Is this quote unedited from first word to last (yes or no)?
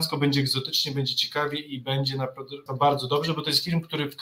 no